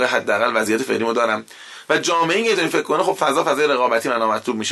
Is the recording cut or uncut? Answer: uncut